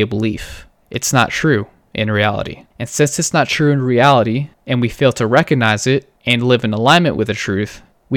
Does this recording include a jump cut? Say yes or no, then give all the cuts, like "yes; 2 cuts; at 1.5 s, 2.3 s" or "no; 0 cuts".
yes; 3 cuts; at 2.7 s, 4.5 s, 6.2 s